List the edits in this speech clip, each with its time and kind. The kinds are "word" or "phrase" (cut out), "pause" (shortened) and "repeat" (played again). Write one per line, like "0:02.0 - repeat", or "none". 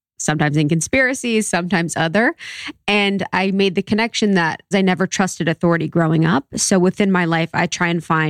0:04.7 - word